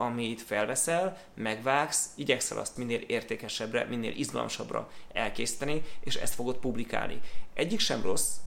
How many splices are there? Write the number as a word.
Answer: one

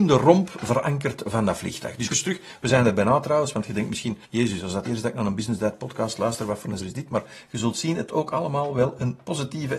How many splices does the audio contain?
five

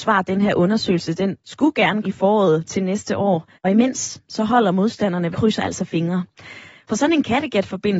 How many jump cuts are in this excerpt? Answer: four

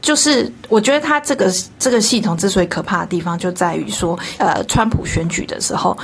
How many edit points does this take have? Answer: one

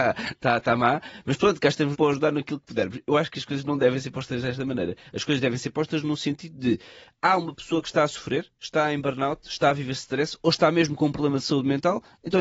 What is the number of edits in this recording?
one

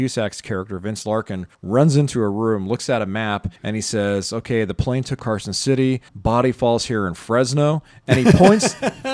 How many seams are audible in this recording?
four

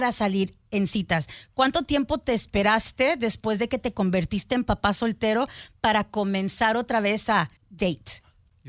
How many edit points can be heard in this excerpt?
one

